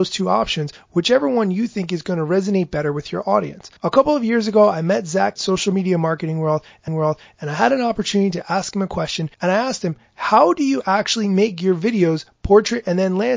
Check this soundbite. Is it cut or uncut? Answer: cut